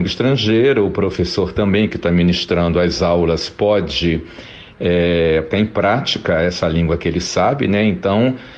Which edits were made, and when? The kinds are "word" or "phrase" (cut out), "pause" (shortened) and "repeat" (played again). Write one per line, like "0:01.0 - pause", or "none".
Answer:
0:05.5 - word

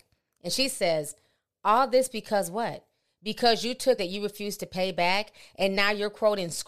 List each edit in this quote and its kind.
0:04.0 - word

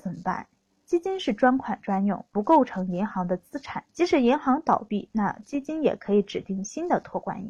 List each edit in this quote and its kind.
0:03.9 - pause

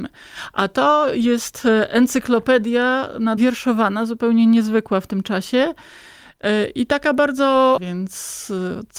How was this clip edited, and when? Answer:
0:03.4 - word
0:07.8 - word

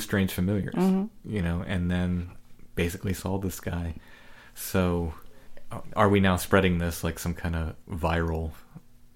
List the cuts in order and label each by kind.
none

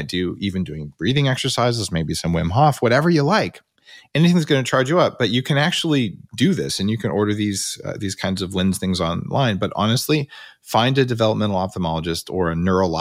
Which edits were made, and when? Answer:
0:03.8 - pause

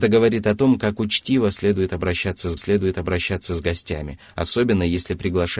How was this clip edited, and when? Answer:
0:02.6 - repeat

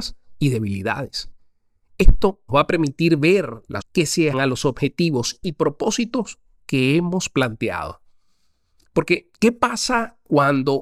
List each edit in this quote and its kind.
0:02.5 - word
0:03.8 - word
0:04.3 - word
0:05.4 - word

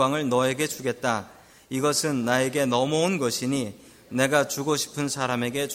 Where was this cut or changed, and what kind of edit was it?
none

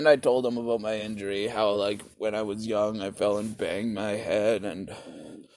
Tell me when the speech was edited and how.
none

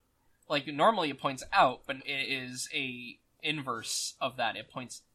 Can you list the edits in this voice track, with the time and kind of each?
0:02.0 - word

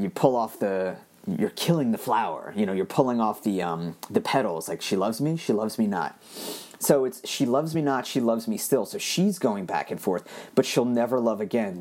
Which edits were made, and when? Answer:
none

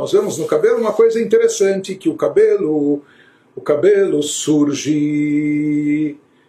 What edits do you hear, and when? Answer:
none

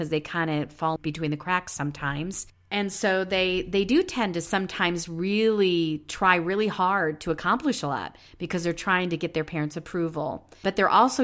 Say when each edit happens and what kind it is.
0:01.0 - word

